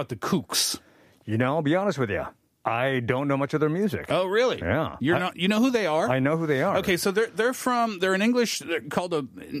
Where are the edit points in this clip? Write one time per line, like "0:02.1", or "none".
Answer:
none

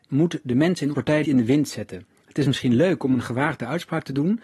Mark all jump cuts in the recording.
0:00.9
0:01.2

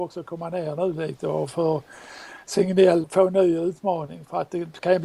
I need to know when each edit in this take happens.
0:03.0

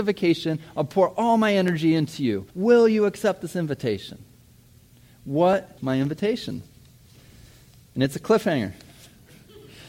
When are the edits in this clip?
0:02.5
0:05.8

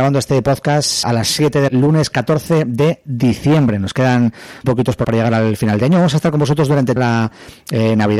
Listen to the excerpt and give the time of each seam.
0:01.0
0:01.7
0:04.6
0:05.0
0:07.0

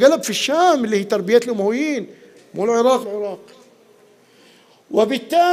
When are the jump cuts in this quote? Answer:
0:03.0

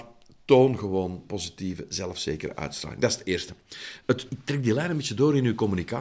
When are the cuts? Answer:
0:01.2
0:04.3

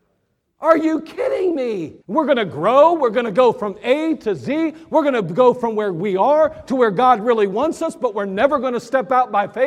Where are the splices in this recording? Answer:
0:02.0

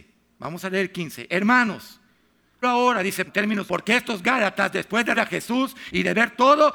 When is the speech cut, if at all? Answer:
0:02.6
0:03.3
0:03.7
0:05.2

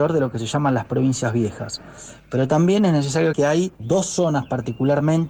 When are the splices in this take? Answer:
0:03.3
0:03.7

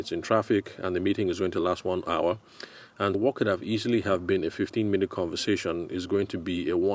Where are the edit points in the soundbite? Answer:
0:03.1

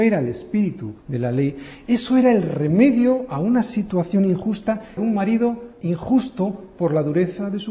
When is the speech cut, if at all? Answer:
0:01.0
0:05.0
0:05.7

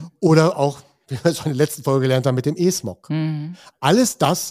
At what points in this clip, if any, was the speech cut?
none

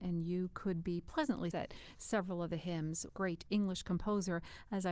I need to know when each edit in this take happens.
0:01.5
0:03.1

